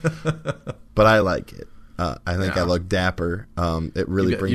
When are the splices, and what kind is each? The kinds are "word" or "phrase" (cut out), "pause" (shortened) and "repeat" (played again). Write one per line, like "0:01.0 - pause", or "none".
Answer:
none